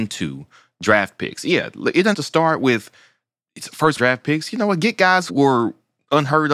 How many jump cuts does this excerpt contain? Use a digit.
3